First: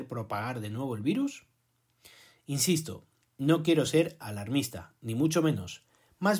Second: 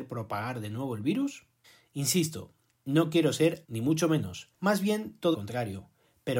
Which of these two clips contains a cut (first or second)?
second